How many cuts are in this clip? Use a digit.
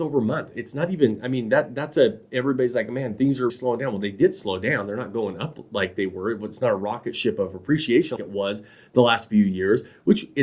2